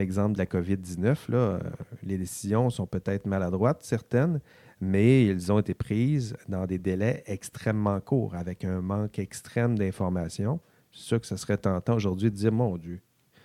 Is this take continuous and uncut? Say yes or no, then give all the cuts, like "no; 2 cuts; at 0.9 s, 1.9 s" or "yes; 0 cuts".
yes; 0 cuts